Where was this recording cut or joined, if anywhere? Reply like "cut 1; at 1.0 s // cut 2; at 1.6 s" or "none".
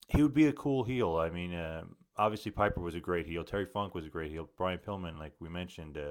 none